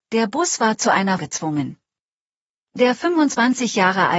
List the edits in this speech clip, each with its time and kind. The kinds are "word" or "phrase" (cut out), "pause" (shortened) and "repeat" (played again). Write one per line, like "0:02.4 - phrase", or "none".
0:01.2 - word